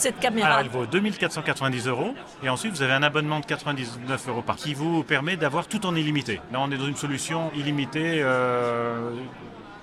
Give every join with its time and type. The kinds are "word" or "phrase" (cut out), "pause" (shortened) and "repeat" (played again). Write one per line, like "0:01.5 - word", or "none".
0:04.5 - word
0:07.5 - word